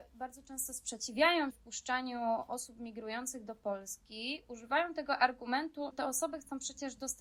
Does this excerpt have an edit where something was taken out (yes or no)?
yes